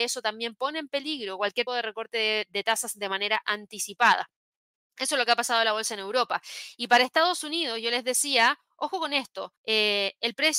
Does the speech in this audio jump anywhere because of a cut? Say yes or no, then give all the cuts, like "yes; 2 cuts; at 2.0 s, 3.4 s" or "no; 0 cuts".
yes; 2 cuts; at 1.7 s, 9.6 s